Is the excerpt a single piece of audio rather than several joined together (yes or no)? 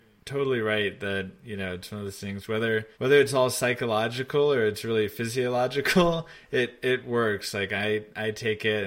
no